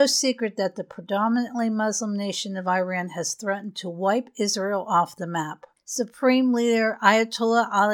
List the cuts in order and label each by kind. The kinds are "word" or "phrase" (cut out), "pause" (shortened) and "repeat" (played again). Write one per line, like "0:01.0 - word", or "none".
none

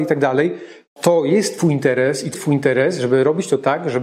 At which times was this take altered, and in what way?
0:01.0 - word
0:02.3 - word

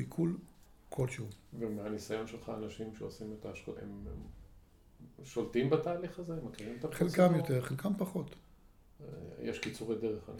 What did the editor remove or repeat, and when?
0:03.8 - word

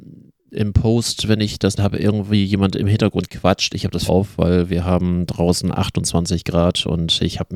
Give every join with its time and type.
0:01.8 - word
0:04.1 - word

